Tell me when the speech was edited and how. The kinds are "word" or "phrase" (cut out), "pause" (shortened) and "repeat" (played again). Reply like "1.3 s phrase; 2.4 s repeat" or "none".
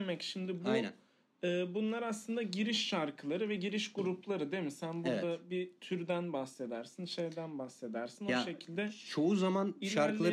none